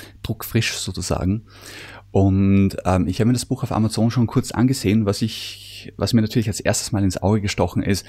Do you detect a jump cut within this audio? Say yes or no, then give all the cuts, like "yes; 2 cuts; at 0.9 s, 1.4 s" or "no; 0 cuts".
no; 0 cuts